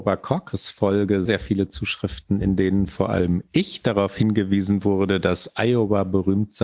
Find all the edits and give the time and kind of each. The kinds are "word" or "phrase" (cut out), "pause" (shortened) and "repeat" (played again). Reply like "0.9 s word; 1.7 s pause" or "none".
1.3 s word